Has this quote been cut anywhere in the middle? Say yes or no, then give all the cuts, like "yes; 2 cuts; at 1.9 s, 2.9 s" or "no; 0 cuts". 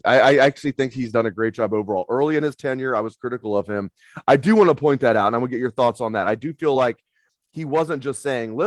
no; 0 cuts